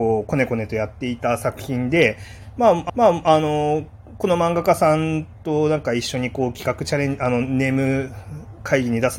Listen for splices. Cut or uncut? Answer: cut